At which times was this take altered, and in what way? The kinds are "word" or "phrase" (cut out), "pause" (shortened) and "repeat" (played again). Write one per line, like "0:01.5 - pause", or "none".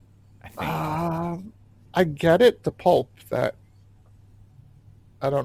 0:02.6 - phrase